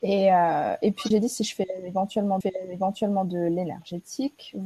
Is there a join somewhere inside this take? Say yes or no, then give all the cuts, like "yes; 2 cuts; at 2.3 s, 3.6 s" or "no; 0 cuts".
yes; 2 cuts; at 1.1 s, 2.4 s